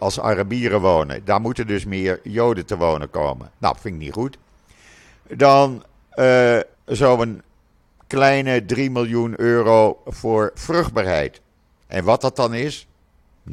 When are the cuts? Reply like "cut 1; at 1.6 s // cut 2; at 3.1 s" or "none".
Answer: cut 1; at 3.6 s // cut 2; at 6.7 s